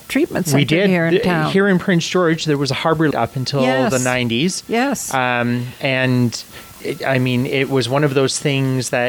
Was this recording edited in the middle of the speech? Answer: yes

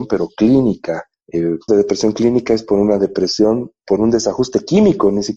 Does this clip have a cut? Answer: yes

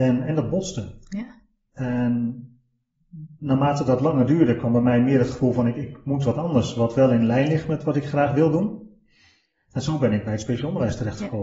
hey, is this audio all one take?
yes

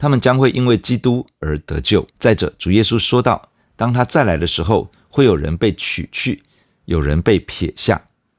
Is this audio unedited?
no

